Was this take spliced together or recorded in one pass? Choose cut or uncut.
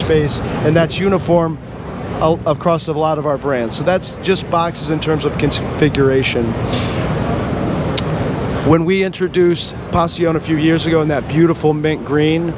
uncut